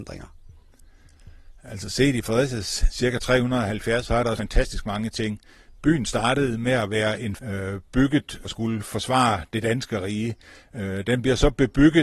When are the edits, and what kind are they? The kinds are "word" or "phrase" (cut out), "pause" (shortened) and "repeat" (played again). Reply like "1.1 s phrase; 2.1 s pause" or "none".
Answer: 4.0 s phrase; 4.4 s word; 7.4 s word; 8.4 s word